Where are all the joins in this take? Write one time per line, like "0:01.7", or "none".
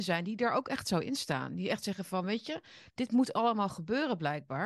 none